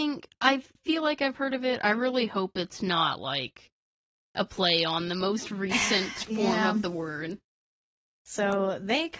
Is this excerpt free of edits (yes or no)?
yes